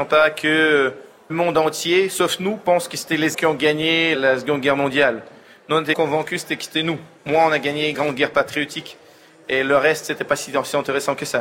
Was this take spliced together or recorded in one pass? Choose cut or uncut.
cut